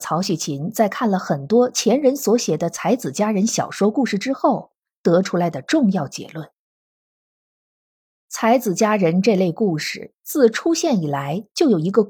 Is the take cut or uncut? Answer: uncut